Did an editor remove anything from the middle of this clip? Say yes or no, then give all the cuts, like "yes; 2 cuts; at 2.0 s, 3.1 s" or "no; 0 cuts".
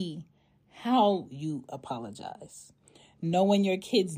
no; 0 cuts